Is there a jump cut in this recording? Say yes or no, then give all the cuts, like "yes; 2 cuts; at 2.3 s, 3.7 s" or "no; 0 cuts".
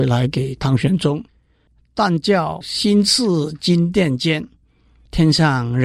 no; 0 cuts